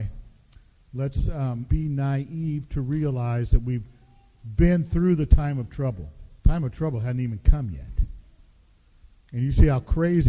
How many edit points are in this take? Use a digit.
2